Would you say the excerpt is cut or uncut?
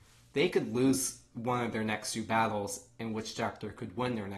uncut